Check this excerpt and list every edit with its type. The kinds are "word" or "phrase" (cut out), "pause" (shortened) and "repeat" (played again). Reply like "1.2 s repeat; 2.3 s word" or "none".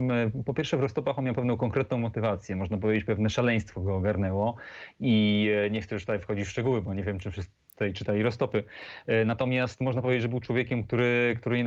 none